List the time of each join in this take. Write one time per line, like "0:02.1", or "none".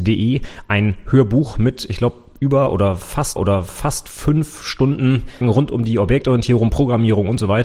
0:03.4
0:05.4